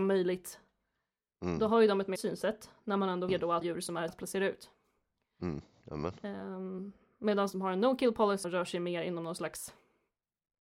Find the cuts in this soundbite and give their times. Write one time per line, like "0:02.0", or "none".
0:02.2
0:03.3
0:03.6
0:04.1
0:07.5
0:08.4